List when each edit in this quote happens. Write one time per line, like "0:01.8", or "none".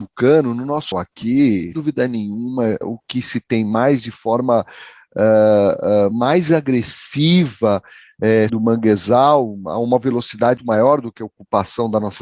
0:00.9
0:01.7
0:02.8
0:06.1
0:08.5
0:10.6